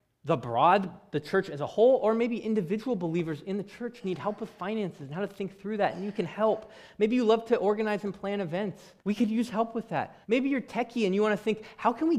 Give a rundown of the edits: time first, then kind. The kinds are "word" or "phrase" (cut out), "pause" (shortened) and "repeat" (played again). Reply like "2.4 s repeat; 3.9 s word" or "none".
9.0 s pause; 10.2 s pause